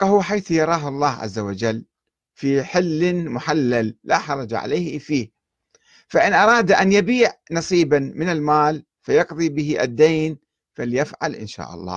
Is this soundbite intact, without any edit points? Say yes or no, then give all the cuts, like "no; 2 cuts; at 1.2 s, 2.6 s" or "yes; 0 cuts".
yes; 0 cuts